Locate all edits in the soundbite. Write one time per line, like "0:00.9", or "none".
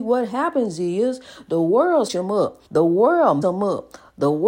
0:02.1
0:02.7
0:03.4